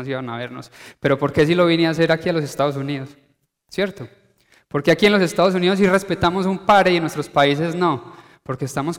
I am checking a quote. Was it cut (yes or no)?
no